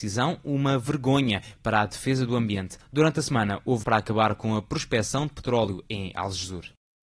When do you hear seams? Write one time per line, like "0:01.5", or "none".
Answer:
0:03.8